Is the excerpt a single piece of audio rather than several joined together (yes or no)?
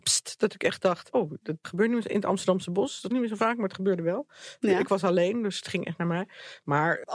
no